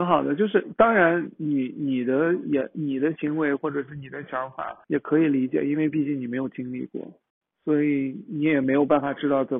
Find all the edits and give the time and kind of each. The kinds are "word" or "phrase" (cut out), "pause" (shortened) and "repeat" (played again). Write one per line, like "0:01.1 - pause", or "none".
0:04.8 - pause